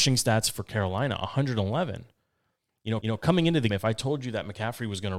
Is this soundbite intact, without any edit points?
no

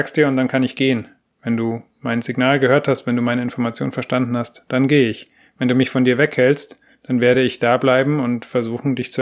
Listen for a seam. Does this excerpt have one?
no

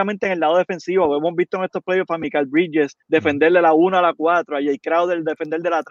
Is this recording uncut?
no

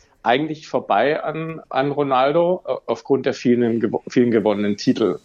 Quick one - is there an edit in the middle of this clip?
no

